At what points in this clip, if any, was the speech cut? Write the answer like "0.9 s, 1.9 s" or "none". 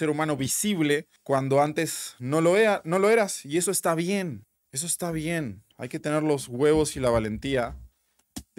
5.7 s